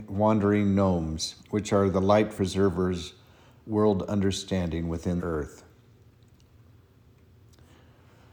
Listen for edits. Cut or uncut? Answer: cut